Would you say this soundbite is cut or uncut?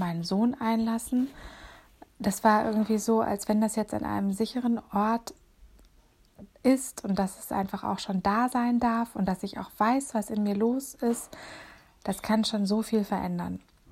uncut